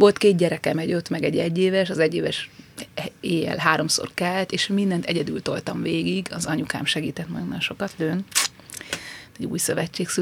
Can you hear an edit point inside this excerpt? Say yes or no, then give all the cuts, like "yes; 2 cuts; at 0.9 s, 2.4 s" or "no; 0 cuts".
no; 0 cuts